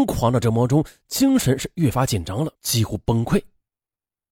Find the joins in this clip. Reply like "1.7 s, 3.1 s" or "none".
2.5 s